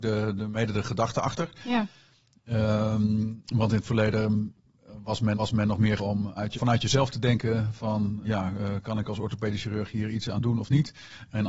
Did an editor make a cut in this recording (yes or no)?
yes